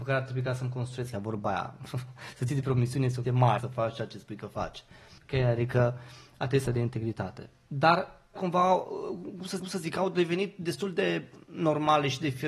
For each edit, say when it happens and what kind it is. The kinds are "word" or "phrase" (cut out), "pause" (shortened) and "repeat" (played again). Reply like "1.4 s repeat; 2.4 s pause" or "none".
1.1 s word; 2.5 s word; 3.2 s word; 3.6 s phrase; 5.2 s pause; 6.7 s phrase; 8.4 s phrase; 9.6 s repeat